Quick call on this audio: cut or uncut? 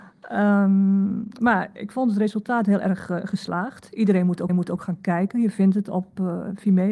cut